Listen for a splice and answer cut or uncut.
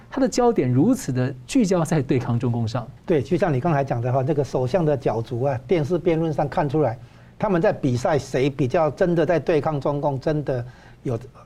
cut